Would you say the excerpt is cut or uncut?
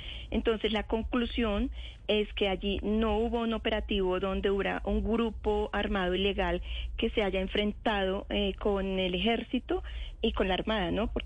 uncut